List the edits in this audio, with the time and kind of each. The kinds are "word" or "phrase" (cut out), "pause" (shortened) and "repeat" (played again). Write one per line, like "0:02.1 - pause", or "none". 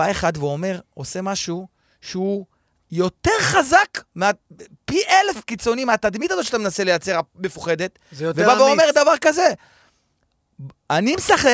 none

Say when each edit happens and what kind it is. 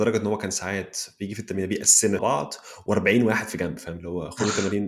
0:02.2 - phrase

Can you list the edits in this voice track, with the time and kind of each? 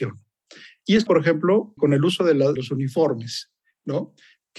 0:01.1 - word
0:01.8 - word
0:02.6 - word

